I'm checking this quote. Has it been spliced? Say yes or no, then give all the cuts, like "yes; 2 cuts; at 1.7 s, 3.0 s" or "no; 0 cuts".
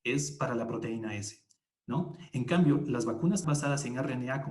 yes; 1 cut; at 3.4 s